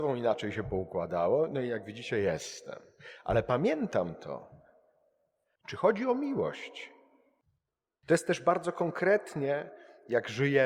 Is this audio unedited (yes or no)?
yes